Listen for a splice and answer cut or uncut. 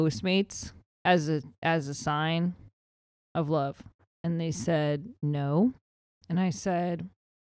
cut